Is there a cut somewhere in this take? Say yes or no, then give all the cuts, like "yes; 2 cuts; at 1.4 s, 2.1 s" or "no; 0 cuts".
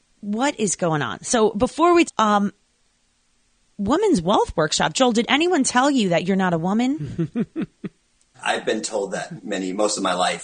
yes; 3 cuts; at 2.1 s, 8.3 s, 9.4 s